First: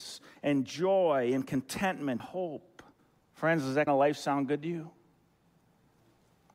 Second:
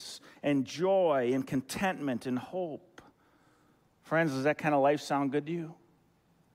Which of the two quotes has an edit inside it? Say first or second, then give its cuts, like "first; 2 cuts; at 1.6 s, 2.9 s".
first; 3 cuts; at 2.2 s, 3.0 s, 3.9 s